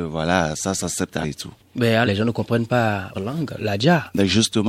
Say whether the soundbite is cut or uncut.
cut